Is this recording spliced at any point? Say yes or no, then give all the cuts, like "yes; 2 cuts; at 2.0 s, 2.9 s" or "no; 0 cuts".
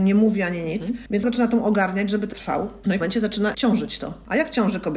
yes; 4 cuts; at 1.2 s, 2.3 s, 3.0 s, 3.5 s